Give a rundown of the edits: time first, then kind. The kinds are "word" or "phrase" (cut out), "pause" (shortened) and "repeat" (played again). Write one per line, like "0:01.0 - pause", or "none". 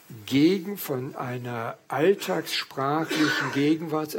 none